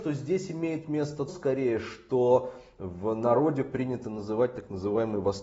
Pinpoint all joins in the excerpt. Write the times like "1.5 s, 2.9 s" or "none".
1.3 s